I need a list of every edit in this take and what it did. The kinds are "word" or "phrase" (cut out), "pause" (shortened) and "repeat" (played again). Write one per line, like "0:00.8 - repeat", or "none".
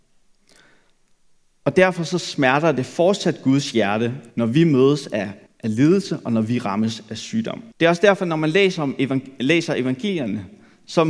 0:04.3 - pause
0:05.5 - pause
0:07.7 - pause